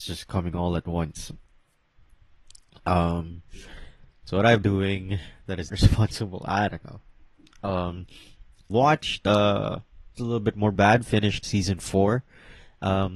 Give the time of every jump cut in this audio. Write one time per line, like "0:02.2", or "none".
0:04.6
0:05.7
0:08.7
0:10.1
0:10.7
0:11.4